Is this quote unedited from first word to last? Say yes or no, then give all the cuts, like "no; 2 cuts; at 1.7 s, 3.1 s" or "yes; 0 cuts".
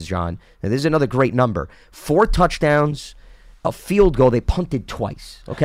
yes; 0 cuts